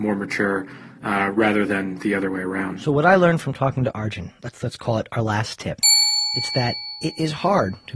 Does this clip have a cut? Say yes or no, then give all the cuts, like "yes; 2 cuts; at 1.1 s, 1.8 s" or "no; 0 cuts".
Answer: no; 0 cuts